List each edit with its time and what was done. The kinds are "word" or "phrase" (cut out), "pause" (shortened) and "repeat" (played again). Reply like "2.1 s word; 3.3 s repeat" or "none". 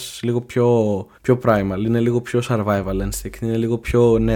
1.1 s pause